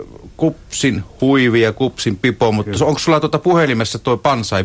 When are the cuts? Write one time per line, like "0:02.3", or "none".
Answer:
none